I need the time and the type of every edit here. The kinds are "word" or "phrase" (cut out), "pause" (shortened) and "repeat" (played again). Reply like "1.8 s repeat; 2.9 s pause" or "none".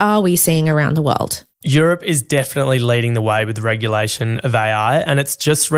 1.5 s pause